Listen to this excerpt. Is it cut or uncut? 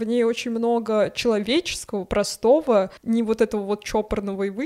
cut